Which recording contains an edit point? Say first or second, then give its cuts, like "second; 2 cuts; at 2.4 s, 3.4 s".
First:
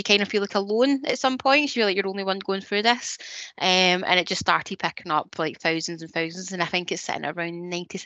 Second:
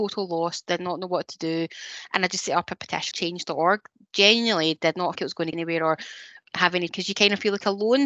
second; 4 cuts; at 3.1 s, 5.2 s, 5.5 s, 6.9 s